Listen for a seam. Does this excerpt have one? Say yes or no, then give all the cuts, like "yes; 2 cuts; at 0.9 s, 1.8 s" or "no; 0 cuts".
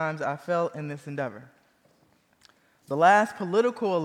no; 0 cuts